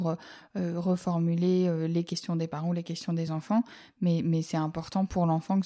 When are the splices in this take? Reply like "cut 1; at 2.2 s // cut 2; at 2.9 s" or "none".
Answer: none